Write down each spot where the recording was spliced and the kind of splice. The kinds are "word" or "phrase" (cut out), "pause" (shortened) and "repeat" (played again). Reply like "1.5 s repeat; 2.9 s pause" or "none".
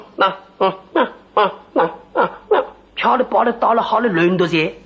none